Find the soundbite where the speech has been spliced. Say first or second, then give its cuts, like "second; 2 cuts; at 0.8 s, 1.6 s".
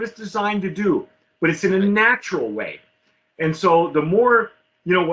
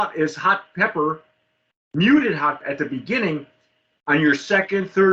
second; 1 cut; at 2.6 s